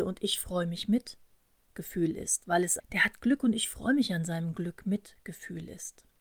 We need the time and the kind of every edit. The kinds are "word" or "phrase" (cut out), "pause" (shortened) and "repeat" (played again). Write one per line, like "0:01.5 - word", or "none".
0:02.8 - word